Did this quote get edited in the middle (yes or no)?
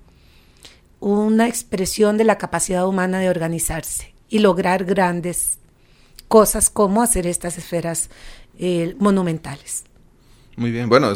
no